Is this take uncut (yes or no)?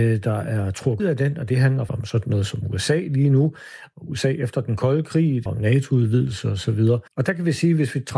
no